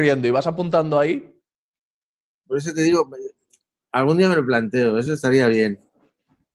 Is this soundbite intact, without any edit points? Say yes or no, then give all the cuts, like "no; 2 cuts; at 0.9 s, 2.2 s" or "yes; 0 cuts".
yes; 0 cuts